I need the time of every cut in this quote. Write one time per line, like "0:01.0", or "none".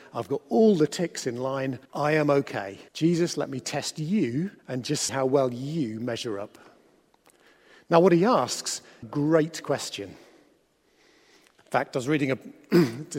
0:01.8
0:02.9
0:04.6
0:05.1
0:09.0

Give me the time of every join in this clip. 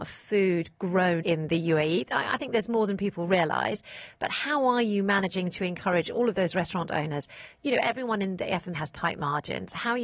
0:01.2
0:08.7

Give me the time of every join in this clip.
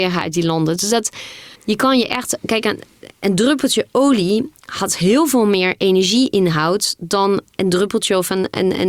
0:01.6

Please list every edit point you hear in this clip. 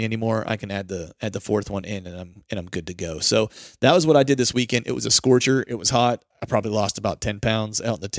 none

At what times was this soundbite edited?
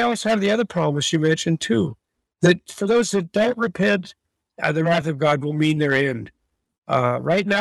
none

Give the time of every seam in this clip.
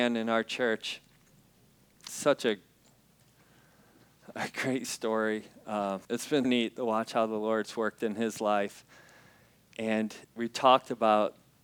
0:02.1
0:06.0
0:06.4
0:10.2

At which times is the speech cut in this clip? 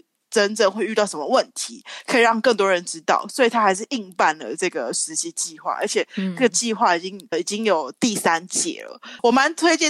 0:07.3

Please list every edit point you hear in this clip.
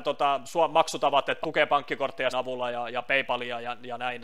0:01.4
0:02.3

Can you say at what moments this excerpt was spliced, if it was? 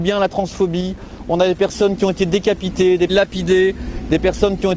0:03.1

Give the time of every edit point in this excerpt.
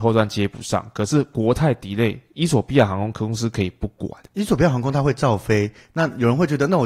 0:04.2

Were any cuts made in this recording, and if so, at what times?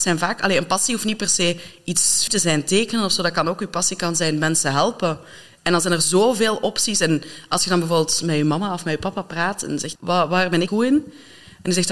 0:02.3
0:10.0
0:10.7

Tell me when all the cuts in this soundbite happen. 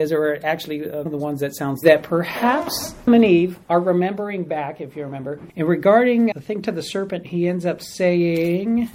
0:01.1
0:01.8
0:03.1
0:03.6
0:06.3

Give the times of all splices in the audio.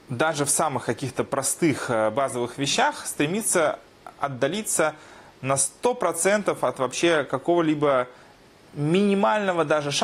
none

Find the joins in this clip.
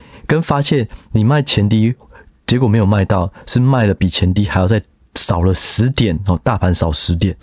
none

